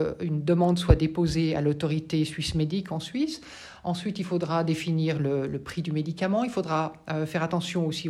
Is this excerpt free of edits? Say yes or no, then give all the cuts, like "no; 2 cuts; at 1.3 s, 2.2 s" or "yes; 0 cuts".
yes; 0 cuts